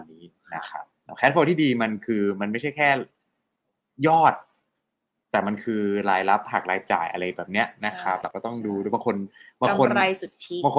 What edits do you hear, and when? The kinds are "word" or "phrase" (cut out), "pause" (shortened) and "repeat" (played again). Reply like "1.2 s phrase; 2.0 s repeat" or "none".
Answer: none